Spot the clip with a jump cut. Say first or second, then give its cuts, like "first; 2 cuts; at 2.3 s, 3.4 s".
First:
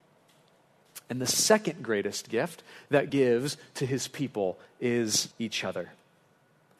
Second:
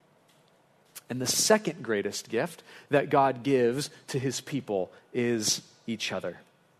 first; 2 cuts; at 3.1 s, 5.3 s